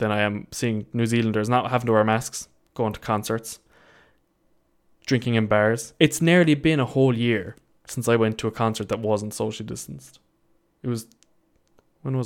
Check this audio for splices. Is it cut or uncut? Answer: uncut